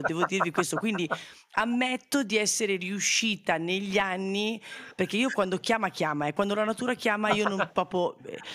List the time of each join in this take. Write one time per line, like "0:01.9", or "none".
none